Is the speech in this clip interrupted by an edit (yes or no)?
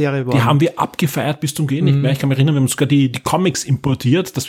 no